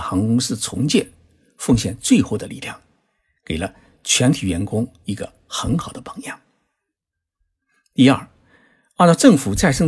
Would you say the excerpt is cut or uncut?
uncut